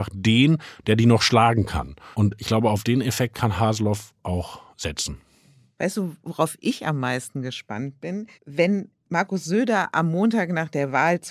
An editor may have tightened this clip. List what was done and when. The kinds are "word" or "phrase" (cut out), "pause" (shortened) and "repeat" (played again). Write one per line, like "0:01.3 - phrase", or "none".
0:02.1 - pause
0:08.3 - pause

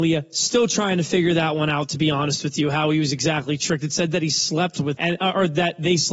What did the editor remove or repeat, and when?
0:05.0 - word

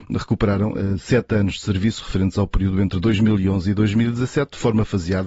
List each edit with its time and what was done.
none

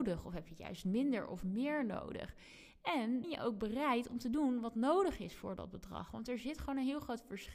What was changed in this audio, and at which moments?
0:03.2 - word

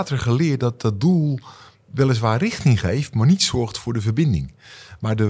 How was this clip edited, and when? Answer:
none

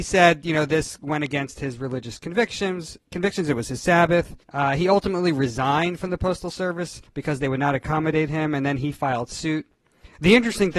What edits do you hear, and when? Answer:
0:04.4 - pause
0:07.1 - pause

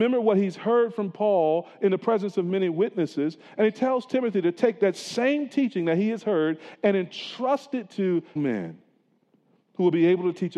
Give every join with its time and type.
0:08.4 - word

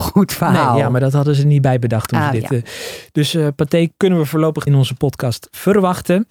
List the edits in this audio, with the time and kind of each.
0:04.7 - phrase

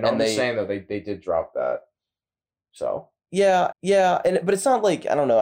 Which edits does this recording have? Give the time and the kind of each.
0:03.7 - repeat

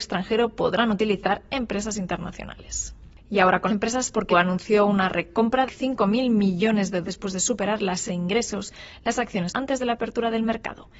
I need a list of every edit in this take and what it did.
0:03.7 - word
0:04.3 - word
0:05.7 - word
0:07.0 - word
0:08.1 - word
0:09.5 - word

